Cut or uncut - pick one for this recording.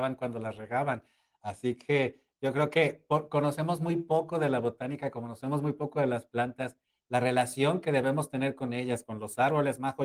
uncut